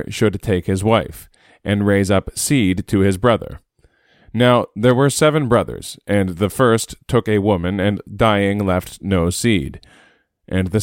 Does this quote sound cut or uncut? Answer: uncut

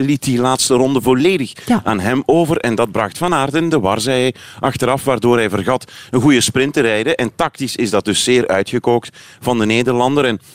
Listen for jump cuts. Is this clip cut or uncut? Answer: uncut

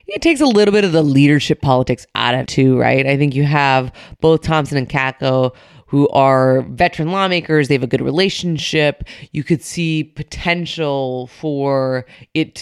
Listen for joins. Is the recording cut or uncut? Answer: cut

